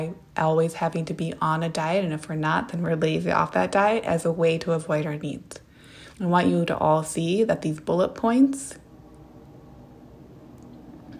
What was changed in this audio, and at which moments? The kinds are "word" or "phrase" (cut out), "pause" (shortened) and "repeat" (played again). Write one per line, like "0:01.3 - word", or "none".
0:06.1 - pause